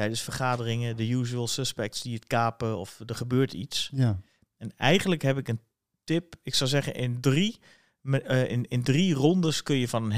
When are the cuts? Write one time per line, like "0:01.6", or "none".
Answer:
none